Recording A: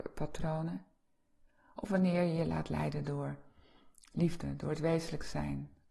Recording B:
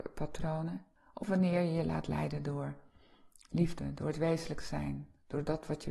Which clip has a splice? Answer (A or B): B